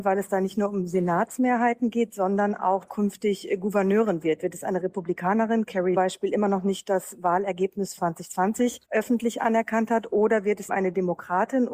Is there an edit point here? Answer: yes; 5 cuts; at 2.8 s, 6.0 s, 8.0 s, 8.8 s, 10.7 s

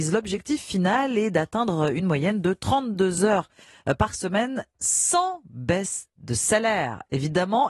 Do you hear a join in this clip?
no; 0 cuts

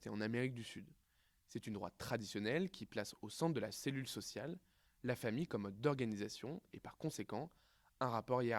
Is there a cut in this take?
no; 0 cuts

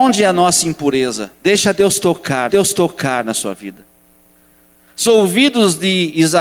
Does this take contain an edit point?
yes; 2 cuts; at 2.5 s, 5.1 s

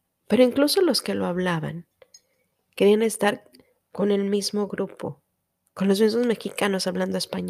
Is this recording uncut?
yes; 0 cuts

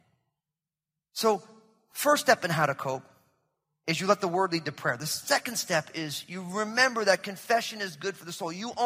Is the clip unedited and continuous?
yes; 0 cuts

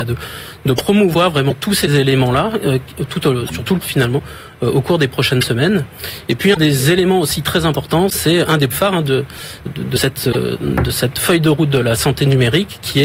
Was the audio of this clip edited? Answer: yes; 3 cuts; at 3.8 s, 8.7 s, 9.7 s

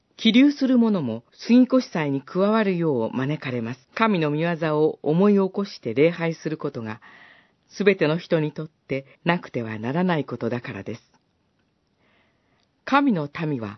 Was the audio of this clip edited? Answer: yes; 3 cuts; at 1.3 s, 3.8 s, 9.1 s

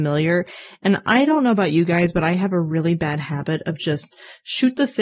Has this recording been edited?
no; 0 cuts

